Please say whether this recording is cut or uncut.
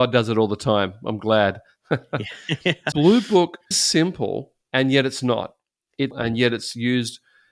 cut